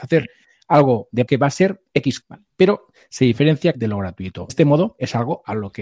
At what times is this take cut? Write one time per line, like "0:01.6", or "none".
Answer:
0:01.3
0:02.2
0:03.7
0:04.5